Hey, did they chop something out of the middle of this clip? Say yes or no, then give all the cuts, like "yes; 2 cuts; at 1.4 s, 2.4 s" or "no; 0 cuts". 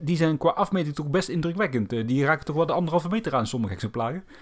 no; 0 cuts